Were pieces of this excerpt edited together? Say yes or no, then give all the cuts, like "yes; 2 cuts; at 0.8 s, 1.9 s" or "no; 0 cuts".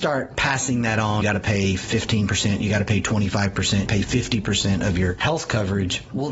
yes; 2 cuts; at 1.2 s, 3.9 s